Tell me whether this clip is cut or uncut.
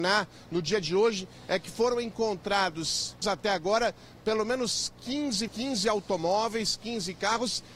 cut